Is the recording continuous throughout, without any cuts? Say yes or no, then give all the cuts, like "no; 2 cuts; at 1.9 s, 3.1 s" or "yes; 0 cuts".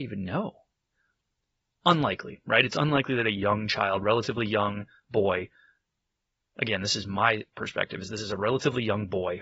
yes; 0 cuts